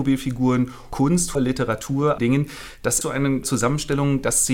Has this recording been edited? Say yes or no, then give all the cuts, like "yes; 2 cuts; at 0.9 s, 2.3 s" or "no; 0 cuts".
yes; 4 cuts; at 1.3 s, 2.2 s, 3.0 s, 3.4 s